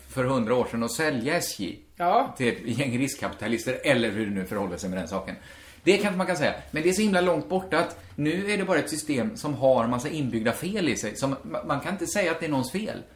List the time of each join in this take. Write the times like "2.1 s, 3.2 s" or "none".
none